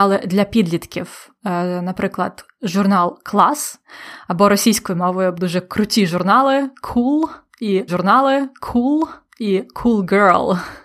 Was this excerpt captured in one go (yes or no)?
no